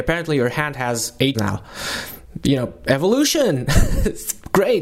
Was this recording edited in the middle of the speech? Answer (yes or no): yes